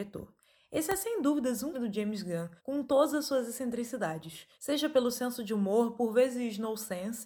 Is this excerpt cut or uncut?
cut